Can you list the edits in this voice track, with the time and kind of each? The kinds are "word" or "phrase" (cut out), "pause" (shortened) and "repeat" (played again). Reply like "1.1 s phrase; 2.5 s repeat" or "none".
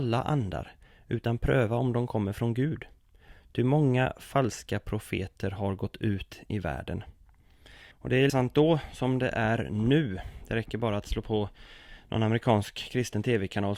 7.9 s pause; 8.3 s word